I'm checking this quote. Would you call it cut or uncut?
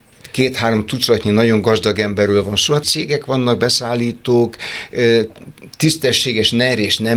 cut